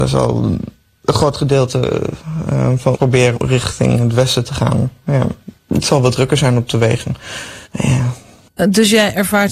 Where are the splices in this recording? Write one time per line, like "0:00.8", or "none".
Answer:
0:02.9
0:03.3
0:05.6
0:07.6

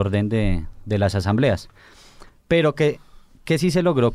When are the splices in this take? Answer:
none

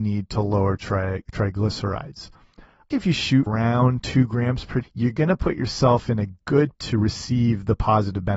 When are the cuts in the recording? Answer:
0:02.9
0:03.5
0:04.8
0:06.7

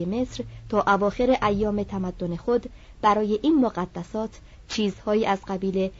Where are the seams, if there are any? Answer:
none

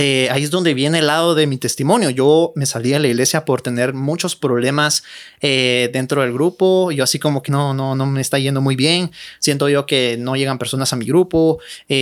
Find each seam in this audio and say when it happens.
0:07.5

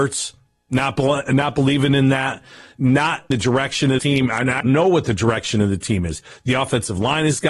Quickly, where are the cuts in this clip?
0:03.3
0:04.0
0:04.6

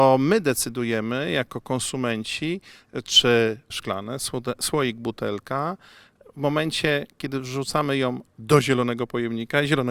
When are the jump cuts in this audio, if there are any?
0:03.7

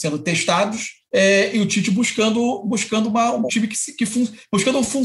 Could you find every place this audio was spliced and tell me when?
0:01.1
0:03.5

